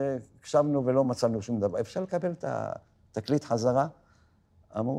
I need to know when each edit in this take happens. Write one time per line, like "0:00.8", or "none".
none